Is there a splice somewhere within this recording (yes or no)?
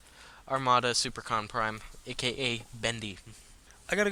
no